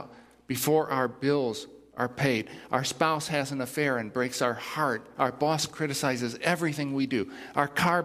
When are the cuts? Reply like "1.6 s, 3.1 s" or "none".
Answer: none